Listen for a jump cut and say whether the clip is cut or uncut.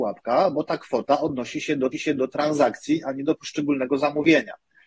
cut